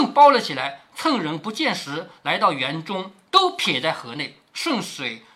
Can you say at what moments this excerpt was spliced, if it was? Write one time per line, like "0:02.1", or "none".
none